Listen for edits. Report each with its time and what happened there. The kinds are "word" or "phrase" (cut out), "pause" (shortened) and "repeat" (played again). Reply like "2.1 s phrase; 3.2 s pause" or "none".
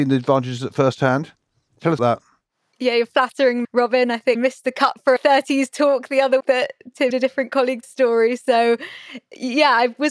2.0 s word; 3.6 s word; 4.3 s word; 5.2 s phrase; 6.4 s word; 7.1 s word; 7.8 s phrase